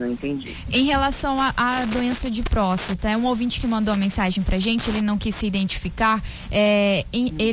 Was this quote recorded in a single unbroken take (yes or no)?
yes